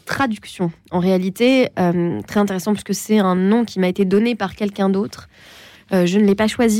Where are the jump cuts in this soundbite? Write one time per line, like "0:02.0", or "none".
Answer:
none

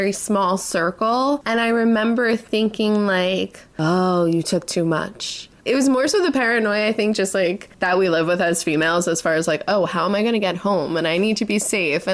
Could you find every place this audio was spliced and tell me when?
0:07.7

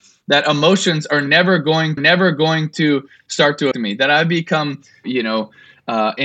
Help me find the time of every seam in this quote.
0:02.0
0:03.7

